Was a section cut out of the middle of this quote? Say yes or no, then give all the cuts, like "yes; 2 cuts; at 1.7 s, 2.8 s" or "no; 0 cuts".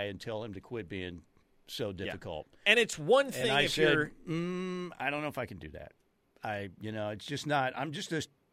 no; 0 cuts